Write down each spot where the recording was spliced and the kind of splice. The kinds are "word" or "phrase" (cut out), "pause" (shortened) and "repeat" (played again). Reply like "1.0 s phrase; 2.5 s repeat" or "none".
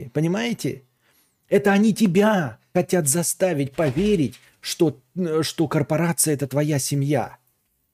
none